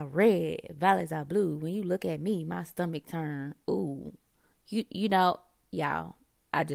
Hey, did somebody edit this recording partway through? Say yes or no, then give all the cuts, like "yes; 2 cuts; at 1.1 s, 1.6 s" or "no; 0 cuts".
no; 0 cuts